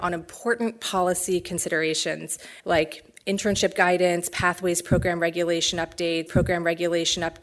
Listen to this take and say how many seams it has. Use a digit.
2